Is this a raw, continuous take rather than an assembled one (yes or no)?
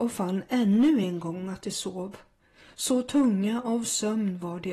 yes